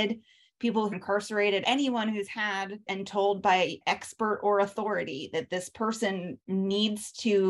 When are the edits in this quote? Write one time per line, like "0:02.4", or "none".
0:00.9
0:01.6
0:02.9
0:03.8